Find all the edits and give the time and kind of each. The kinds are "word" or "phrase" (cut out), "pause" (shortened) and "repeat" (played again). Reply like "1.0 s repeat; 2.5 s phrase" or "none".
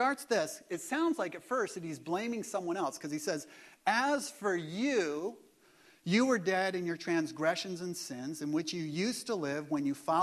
none